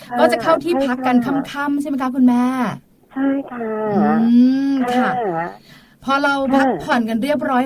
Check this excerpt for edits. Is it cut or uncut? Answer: cut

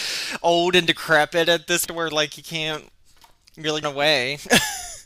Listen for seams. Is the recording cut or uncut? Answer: cut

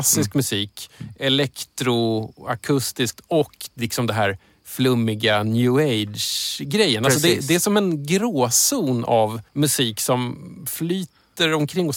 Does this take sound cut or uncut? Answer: cut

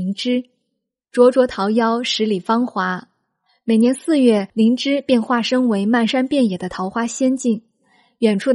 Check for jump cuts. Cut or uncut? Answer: cut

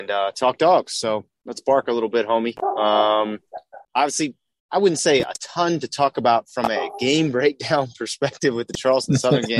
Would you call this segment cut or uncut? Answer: cut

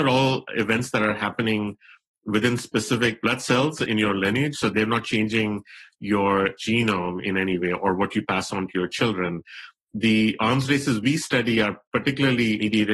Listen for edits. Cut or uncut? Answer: uncut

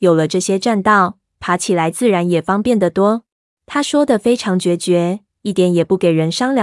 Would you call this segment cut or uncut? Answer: cut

